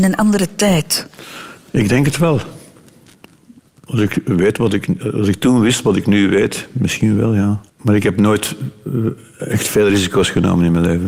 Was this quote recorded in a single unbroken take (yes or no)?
no